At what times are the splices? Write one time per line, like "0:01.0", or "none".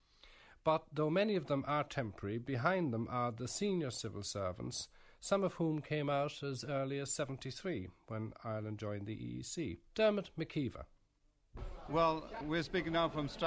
0:09.9
0:12.4